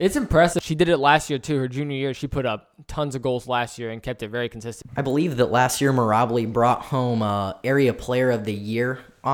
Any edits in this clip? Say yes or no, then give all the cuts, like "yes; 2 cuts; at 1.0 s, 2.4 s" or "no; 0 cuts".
no; 0 cuts